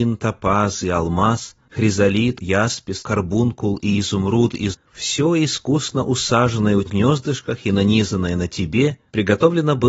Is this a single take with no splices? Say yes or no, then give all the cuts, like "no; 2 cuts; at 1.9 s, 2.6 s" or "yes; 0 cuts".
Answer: no; 4 cuts; at 2.4 s, 3.0 s, 4.7 s, 6.9 s